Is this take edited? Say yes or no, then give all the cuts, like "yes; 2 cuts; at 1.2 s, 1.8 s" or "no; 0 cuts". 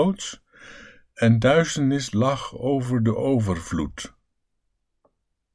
no; 0 cuts